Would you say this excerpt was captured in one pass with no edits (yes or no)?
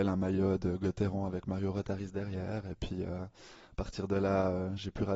yes